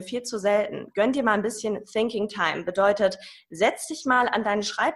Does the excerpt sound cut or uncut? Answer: uncut